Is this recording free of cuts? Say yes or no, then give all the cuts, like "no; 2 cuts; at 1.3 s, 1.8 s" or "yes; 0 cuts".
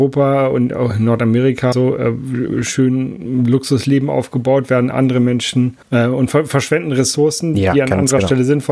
no; 2 cuts; at 1.7 s, 5.8 s